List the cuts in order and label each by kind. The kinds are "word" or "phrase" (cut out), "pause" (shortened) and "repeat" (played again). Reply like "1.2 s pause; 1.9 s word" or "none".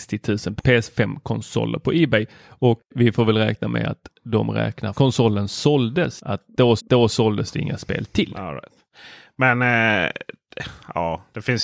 2.8 s pause; 4.9 s phrase; 6.8 s repeat